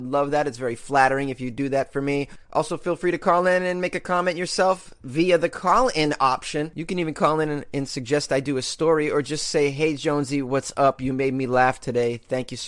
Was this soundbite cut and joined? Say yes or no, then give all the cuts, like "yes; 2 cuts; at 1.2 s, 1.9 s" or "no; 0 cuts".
no; 0 cuts